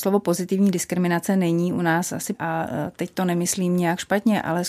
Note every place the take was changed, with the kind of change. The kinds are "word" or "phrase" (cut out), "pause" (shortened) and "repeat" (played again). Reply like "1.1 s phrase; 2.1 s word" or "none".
2.3 s word

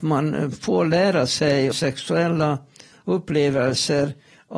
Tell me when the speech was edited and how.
1.7 s word

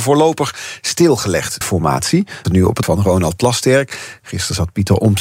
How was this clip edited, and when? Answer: 1.6 s word; 2.4 s word; 2.8 s word

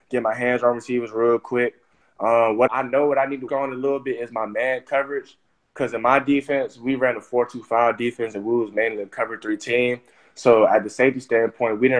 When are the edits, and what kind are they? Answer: 2.7 s word; 3.5 s word

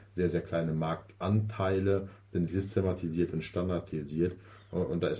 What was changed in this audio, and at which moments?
2.5 s word

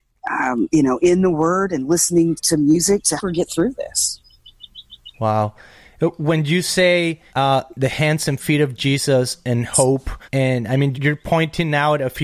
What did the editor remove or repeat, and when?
2.4 s word; 3.2 s word; 5.1 s pause; 7.3 s pause; 10.2 s pause; 10.9 s word

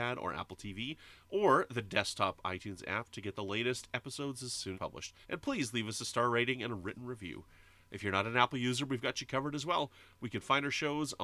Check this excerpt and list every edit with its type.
4.7 s phrase; 5.2 s pause

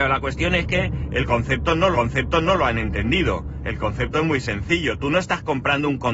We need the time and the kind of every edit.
1.9 s repeat

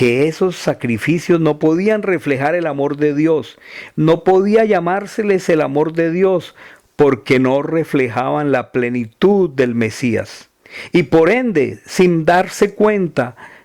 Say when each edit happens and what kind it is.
none

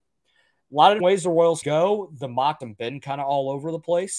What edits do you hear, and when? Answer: 1.0 s word; 1.6 s word; 2.6 s word

